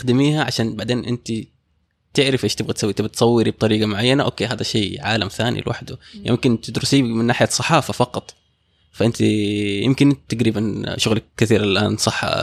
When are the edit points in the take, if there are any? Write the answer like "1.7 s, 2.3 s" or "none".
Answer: none

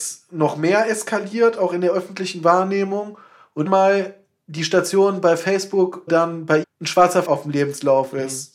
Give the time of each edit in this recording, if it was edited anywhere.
3.7 s, 6.1 s, 6.6 s, 7.2 s

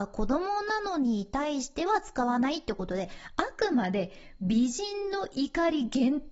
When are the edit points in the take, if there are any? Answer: none

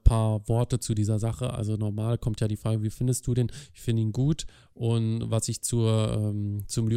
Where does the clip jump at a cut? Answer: none

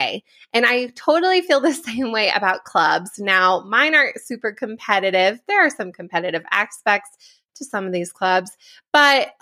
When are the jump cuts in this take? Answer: none

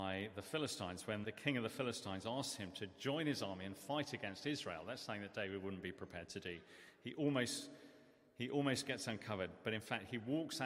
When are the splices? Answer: 1.2 s

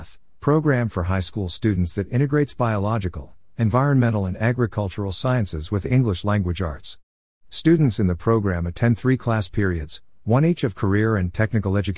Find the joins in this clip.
none

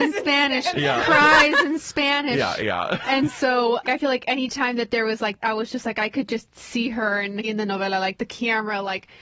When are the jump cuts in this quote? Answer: 3.9 s, 5.4 s, 7.4 s, 8.2 s

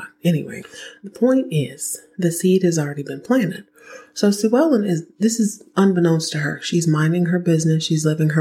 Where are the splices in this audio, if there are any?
none

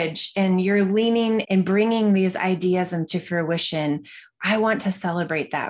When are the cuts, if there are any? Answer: 1.4 s, 3.1 s

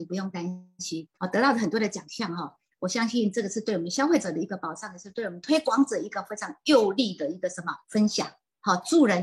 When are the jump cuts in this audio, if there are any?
1.1 s, 7.8 s

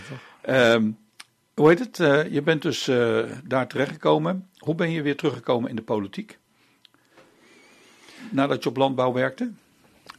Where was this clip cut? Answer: none

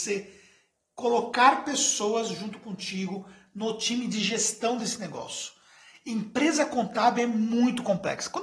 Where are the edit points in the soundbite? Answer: none

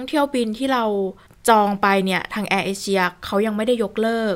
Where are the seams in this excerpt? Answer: 1.3 s

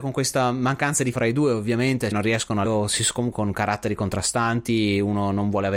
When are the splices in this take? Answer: 1.1 s, 2.1 s, 2.7 s, 3.3 s

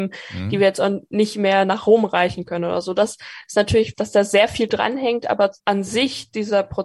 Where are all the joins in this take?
5.6 s

